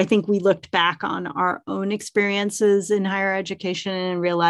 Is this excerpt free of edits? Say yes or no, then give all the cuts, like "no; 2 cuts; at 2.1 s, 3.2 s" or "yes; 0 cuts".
yes; 0 cuts